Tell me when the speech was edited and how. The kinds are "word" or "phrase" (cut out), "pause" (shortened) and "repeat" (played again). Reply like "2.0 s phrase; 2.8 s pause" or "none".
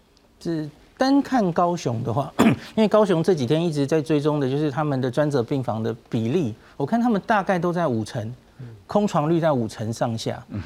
none